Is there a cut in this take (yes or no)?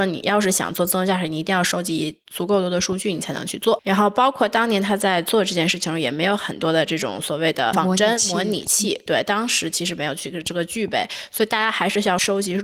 yes